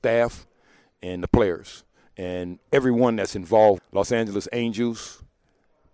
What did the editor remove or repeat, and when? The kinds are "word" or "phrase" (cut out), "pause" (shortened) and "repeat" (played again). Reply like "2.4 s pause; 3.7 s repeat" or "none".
3.8 s phrase